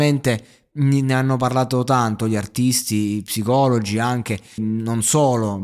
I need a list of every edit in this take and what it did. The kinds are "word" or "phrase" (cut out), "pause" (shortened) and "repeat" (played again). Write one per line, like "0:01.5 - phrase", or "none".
0:04.6 - word